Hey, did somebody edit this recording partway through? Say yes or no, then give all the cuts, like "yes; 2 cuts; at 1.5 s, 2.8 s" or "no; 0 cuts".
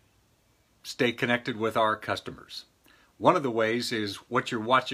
no; 0 cuts